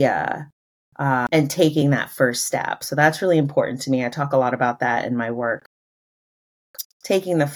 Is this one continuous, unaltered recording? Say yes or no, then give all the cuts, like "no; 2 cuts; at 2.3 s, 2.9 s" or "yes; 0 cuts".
yes; 0 cuts